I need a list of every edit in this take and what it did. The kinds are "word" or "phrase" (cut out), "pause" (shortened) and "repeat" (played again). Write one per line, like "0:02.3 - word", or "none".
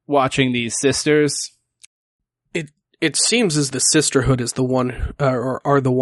0:03.7 - word